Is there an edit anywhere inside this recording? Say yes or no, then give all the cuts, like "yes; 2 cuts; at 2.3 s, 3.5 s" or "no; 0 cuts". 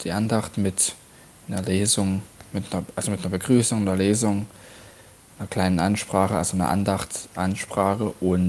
no; 0 cuts